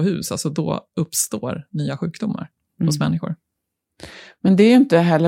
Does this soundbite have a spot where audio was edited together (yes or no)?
no